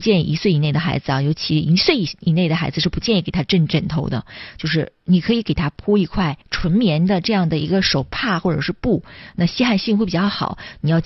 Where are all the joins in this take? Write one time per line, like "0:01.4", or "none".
0:06.4